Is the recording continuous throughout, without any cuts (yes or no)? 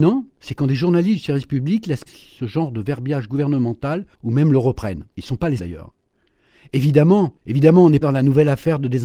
no